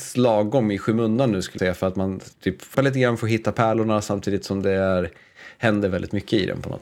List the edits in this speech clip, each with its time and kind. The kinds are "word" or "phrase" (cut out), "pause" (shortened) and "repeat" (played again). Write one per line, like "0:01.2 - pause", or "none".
0:01.6 - word
0:02.3 - pause
0:02.7 - word

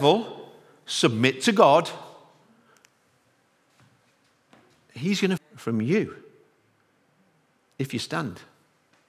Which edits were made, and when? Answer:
0:05.4 - word

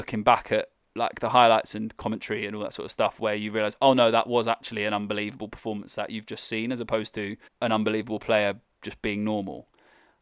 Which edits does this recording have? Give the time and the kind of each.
0:07.5 - pause

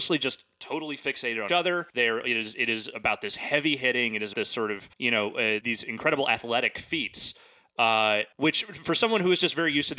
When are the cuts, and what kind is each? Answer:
0:01.5 - word
0:01.9 - pause
0:04.3 - word
0:04.9 - pause
0:05.6 - word
0:08.3 - pause

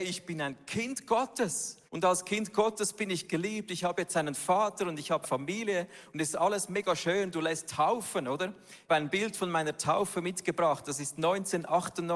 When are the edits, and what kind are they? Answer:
0:01.9 - pause
0:05.2 - word
0:07.7 - word
0:08.9 - word

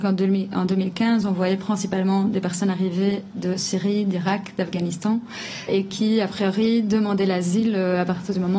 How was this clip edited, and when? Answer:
0:05.7 - word

